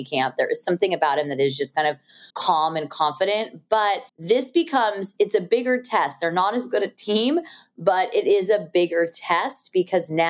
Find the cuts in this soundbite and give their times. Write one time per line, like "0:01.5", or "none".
0:02.3
0:04.1